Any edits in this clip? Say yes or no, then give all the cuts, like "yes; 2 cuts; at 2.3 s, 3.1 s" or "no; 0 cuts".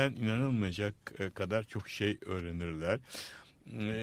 no; 0 cuts